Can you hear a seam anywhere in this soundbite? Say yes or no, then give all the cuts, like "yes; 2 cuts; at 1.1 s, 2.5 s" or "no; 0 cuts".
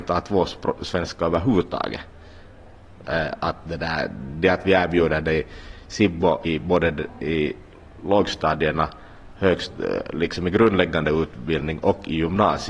yes; 1 cut; at 6.4 s